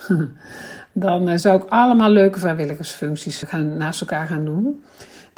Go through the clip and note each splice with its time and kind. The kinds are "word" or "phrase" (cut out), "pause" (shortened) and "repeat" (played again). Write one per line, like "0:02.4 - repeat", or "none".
0:03.4 - word